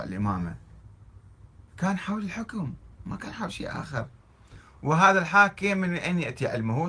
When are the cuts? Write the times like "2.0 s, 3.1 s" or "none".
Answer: 1.7 s